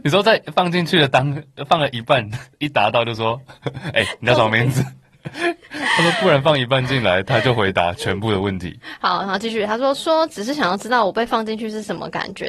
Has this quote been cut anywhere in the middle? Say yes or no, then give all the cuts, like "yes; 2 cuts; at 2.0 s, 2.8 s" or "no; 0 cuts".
yes; 1 cut; at 2.5 s